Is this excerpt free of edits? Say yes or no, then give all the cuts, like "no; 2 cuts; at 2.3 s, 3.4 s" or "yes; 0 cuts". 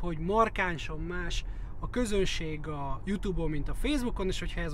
yes; 0 cuts